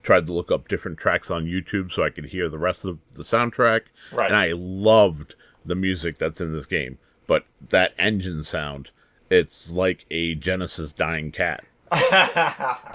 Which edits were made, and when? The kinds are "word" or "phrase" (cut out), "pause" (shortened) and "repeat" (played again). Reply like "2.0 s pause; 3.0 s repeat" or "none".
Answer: none